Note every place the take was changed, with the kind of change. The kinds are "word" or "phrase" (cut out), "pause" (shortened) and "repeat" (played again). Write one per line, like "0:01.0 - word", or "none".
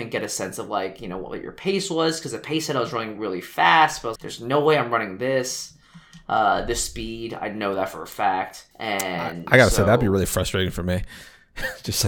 0:04.2 - word
0:08.7 - pause